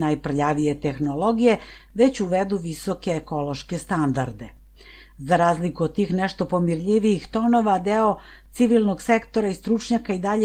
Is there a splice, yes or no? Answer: no